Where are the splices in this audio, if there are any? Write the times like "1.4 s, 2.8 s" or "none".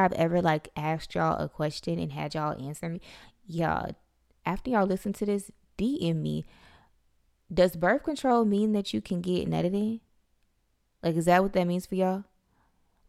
none